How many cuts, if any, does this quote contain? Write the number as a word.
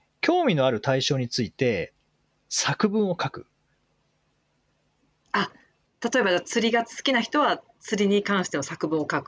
zero